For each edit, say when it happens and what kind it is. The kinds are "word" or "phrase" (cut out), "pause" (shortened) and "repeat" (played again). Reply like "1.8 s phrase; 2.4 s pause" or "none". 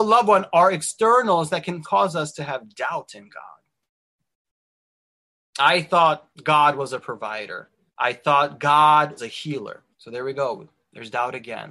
1.8 s word; 6.3 s pause; 7.9 s pause; 9.2 s word; 9.9 s pause